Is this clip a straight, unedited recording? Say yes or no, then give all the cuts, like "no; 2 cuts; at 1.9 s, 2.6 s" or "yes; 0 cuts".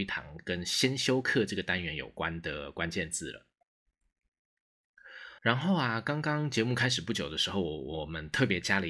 no; 1 cut; at 5.4 s